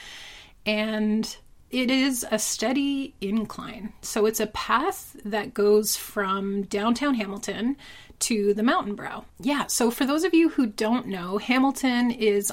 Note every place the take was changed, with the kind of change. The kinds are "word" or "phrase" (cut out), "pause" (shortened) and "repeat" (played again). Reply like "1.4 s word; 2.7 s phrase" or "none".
9.3 s pause

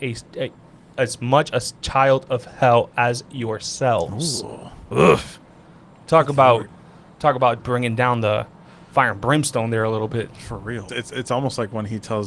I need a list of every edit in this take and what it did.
7.6 s word; 10.9 s word

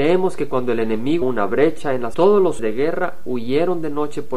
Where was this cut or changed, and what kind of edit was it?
1.2 s word; 2.1 s word; 2.6 s word

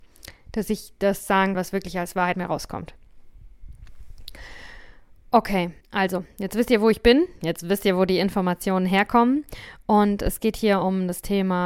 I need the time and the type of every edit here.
1.5 s word; 2.3 s word; 5.8 s pause

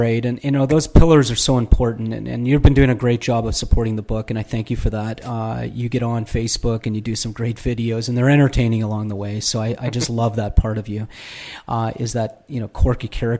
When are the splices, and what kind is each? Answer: none

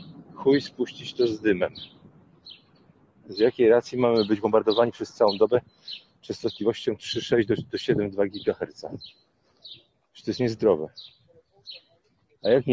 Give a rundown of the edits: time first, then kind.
none

